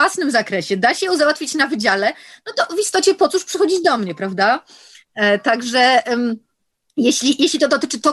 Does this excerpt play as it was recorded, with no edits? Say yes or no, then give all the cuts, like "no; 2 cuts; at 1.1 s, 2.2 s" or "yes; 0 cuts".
yes; 0 cuts